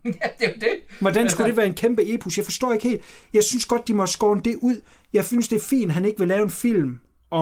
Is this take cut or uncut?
uncut